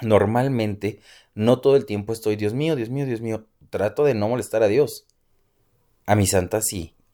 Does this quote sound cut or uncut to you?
uncut